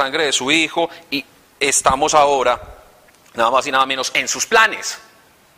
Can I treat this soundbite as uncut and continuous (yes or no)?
yes